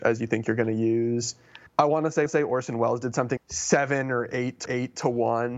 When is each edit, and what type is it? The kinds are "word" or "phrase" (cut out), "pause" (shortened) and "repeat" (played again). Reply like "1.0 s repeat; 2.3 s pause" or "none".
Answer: 1.7 s pause; 2.3 s repeat; 3.4 s word; 4.7 s repeat